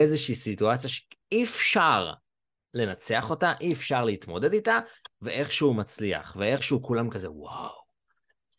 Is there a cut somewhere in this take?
no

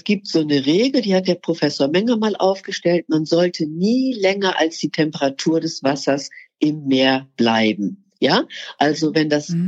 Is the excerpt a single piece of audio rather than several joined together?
yes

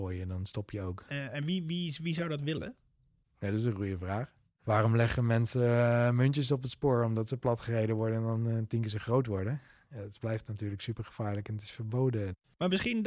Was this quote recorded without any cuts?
yes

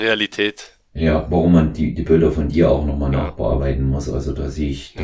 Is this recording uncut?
yes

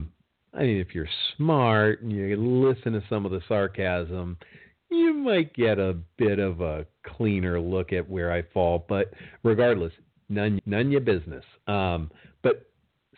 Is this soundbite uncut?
no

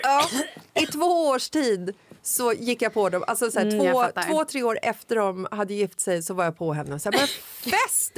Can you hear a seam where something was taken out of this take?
no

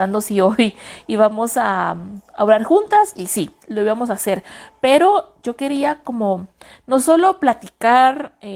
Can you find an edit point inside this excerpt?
no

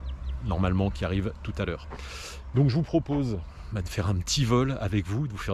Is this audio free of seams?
yes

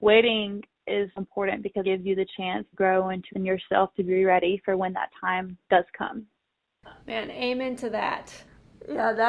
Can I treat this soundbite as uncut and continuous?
no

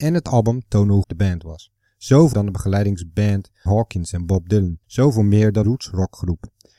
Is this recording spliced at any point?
yes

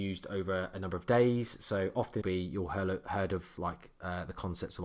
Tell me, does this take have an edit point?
yes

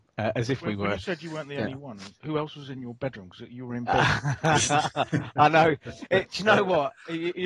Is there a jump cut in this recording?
yes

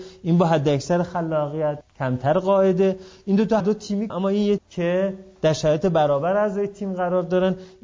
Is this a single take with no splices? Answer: no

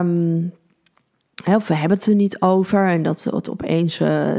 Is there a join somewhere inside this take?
no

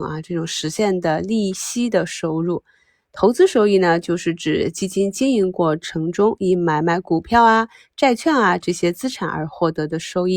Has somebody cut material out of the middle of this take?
no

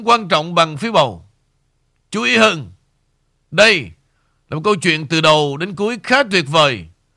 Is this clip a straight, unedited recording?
yes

